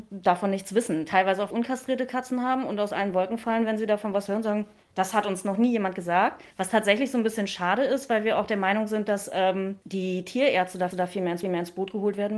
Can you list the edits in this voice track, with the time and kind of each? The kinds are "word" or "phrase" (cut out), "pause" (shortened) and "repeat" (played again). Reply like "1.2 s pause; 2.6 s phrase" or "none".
1.5 s word; 6.5 s pause; 10.9 s repeat; 11.4 s repeat